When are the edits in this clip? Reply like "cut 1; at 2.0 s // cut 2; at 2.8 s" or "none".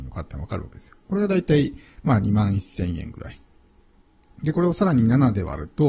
none